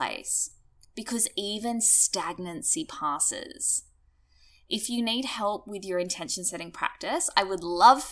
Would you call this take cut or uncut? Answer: uncut